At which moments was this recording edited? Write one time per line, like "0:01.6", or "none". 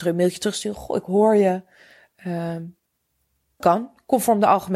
0:03.6